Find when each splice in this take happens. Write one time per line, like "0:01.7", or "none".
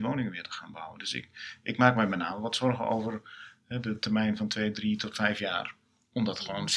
none